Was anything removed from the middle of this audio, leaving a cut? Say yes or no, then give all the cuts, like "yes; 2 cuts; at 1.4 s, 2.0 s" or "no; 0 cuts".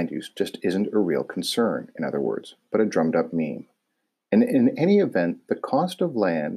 no; 0 cuts